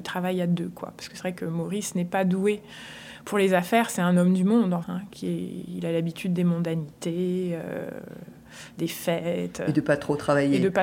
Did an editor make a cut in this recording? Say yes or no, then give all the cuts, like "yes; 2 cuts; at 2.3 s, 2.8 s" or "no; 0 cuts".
yes; 1 cut; at 4.8 s